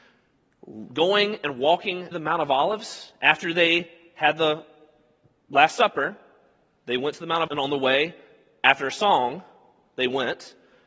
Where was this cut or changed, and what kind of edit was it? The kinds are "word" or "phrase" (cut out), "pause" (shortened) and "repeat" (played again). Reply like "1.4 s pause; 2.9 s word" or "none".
2.1 s word; 7.5 s word